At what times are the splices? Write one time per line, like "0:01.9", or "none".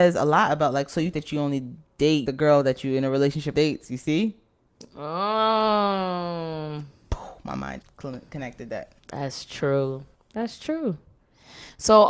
0:01.1
0:02.2
0:03.5
0:07.8
0:09.0
0:10.1

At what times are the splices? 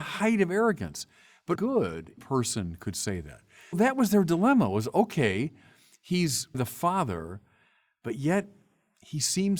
0:01.5
0:02.2
0:03.7
0:06.5

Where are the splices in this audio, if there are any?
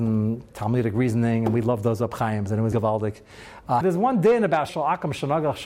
0:02.7
0:03.8
0:04.7

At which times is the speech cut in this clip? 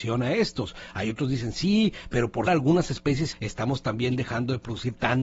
0:02.5
0:03.3

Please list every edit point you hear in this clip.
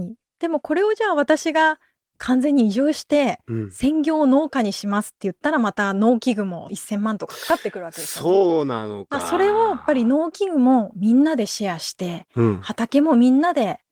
none

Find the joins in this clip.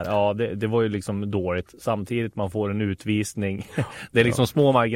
none

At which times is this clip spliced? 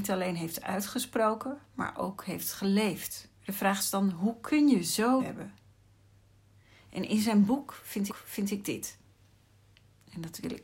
0:01.7
0:03.4
0:05.2
0:08.1

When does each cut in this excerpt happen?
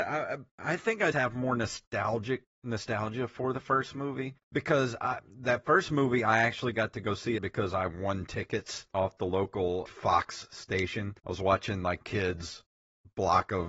0:01.1
0:02.5
0:04.4
0:07.4
0:08.9
0:09.9
0:11.2
0:12.0

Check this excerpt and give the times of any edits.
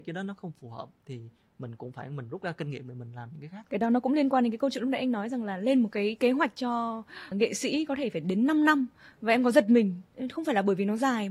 0:03.7
0:07.3

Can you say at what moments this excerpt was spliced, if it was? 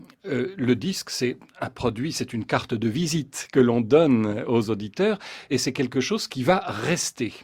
none

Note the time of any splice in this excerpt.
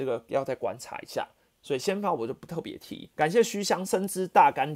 0:03.1

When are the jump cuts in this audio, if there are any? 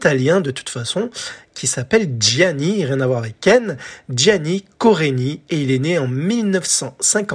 none

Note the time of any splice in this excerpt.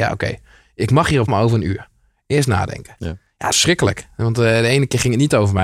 0:01.3
0:03.5

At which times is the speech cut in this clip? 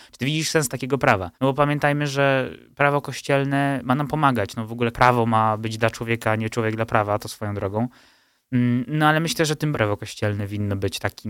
0:01.3
0:04.9
0:09.7

